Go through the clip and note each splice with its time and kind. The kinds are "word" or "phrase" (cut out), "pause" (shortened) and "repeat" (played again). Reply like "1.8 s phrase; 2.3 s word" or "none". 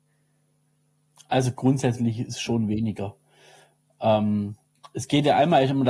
none